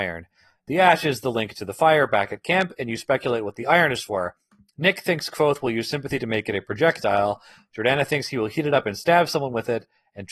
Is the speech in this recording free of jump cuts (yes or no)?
yes